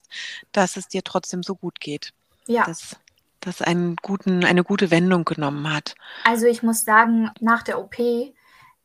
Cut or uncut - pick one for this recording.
cut